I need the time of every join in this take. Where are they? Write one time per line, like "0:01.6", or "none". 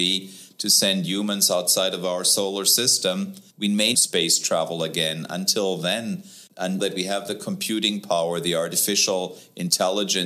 0:03.5
0:03.9
0:06.8